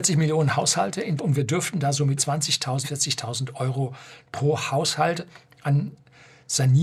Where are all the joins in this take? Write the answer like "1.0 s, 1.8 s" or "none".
1.2 s, 2.2 s, 2.8 s